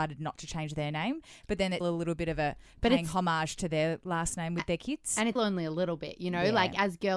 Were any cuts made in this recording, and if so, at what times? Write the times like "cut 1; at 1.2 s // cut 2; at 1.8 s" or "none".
cut 1; at 1.8 s // cut 2; at 5.4 s